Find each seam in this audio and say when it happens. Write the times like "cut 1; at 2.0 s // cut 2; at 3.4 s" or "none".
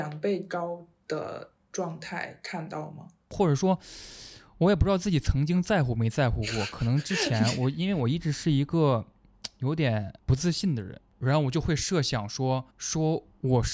cut 1; at 10.2 s // cut 2; at 12.7 s